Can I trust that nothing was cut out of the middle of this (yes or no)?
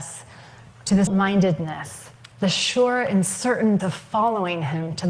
no